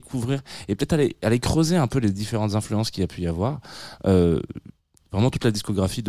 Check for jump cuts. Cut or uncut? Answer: uncut